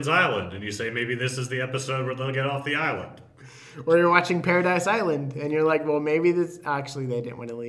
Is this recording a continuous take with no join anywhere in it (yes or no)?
yes